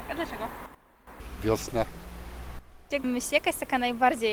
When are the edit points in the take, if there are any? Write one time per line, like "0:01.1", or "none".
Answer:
0:03.0